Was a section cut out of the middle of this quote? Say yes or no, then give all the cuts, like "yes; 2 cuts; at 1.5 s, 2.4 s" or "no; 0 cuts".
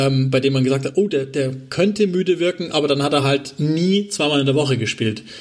no; 0 cuts